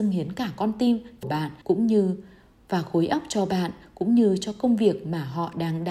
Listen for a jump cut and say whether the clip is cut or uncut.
cut